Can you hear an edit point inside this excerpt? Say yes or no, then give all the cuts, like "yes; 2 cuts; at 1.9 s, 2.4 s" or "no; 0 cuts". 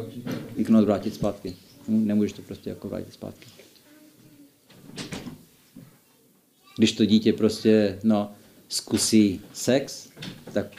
no; 0 cuts